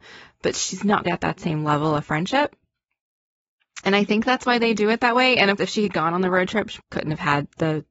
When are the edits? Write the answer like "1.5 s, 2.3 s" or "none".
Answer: 1.1 s, 5.6 s, 6.8 s